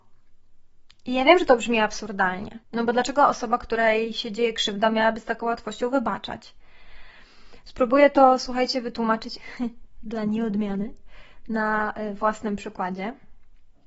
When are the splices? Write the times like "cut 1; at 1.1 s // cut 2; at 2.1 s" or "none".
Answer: cut 1; at 2.6 s